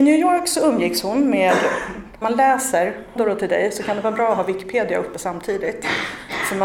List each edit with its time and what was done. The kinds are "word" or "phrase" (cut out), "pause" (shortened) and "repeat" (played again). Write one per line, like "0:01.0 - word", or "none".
0:02.2 - phrase
0:03.2 - word